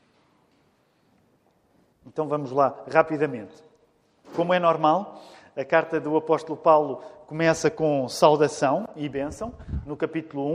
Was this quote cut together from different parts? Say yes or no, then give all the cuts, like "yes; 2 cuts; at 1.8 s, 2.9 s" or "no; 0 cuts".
no; 0 cuts